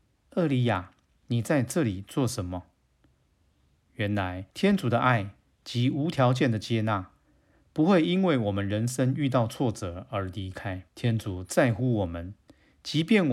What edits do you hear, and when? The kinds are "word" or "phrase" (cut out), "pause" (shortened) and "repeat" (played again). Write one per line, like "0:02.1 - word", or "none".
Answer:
0:04.5 - pause
0:10.9 - pause